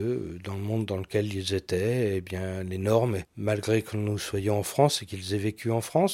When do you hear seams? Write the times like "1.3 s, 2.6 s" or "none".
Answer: none